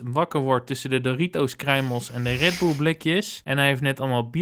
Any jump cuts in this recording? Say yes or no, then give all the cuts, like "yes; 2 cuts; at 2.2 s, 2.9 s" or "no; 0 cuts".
no; 0 cuts